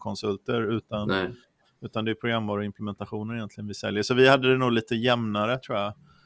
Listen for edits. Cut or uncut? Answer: uncut